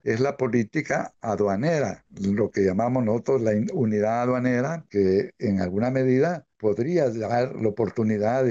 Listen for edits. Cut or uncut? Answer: uncut